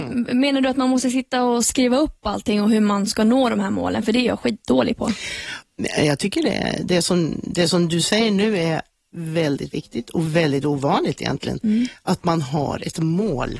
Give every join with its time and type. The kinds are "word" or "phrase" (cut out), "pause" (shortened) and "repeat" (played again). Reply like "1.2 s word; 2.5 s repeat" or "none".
none